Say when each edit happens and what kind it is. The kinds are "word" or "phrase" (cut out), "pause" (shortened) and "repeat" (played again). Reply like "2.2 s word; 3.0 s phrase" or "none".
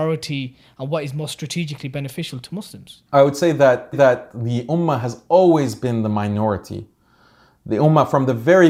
3.1 s pause; 3.9 s repeat